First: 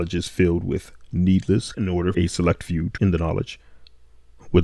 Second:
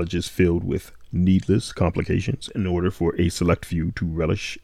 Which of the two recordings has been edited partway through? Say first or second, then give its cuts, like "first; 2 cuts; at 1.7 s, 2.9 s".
first; 3 cuts; at 1.7 s, 2.1 s, 3.0 s